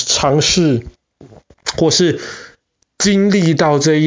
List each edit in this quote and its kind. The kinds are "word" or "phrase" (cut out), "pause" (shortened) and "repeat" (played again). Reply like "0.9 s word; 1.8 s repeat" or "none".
none